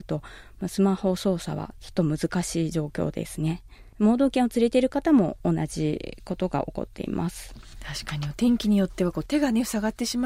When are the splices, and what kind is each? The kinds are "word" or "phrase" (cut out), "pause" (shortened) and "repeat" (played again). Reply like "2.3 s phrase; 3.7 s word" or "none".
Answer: 3.9 s pause